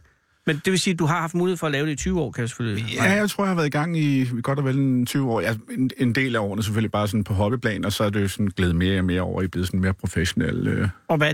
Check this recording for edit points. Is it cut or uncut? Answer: uncut